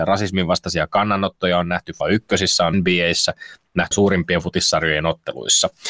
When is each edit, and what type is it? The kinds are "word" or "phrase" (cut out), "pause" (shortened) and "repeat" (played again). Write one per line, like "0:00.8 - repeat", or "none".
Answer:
0:02.0 - word
0:02.7 - word
0:03.9 - word